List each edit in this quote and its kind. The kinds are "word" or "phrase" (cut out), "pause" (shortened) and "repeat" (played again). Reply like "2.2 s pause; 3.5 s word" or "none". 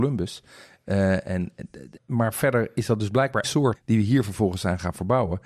2.0 s word; 3.4 s word; 3.7 s word